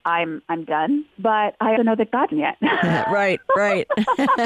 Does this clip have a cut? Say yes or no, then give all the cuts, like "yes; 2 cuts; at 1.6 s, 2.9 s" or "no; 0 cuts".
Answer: yes; 3 cuts; at 1.1 s, 1.8 s, 2.3 s